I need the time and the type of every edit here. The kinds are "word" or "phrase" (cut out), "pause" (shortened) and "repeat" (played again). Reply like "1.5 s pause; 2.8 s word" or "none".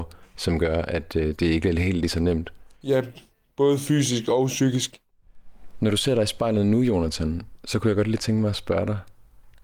none